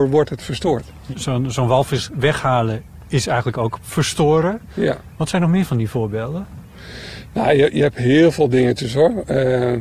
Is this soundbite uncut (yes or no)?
yes